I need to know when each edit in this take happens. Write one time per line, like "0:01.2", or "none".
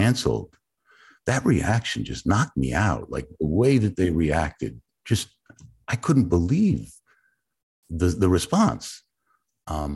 none